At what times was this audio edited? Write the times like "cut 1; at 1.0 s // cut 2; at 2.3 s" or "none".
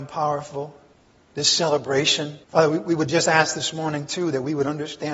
cut 1; at 0.9 s // cut 2; at 2.4 s